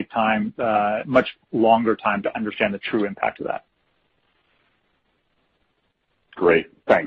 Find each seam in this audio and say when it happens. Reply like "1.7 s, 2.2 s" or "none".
none